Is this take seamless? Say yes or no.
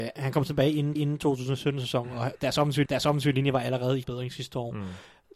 no